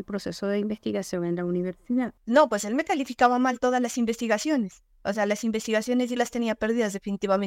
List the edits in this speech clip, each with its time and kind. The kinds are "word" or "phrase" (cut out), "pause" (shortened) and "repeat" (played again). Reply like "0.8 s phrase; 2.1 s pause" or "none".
2.2 s pause